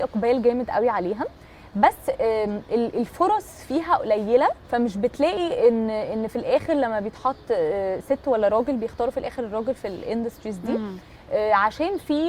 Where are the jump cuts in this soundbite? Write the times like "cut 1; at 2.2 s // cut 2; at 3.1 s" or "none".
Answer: cut 1; at 4.6 s